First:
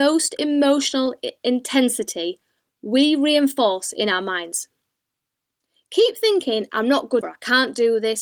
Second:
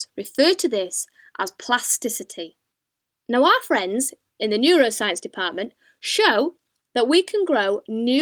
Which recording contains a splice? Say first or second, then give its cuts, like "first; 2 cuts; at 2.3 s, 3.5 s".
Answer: first; 1 cut; at 7.2 s